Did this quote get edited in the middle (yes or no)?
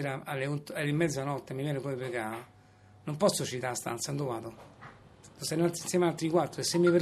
no